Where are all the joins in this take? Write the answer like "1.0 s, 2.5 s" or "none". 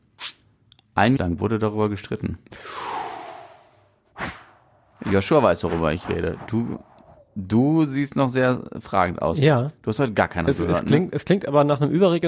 1.2 s, 10.5 s